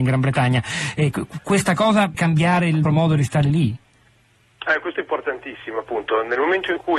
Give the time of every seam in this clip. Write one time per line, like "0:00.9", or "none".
0:02.1
0:02.8
0:04.9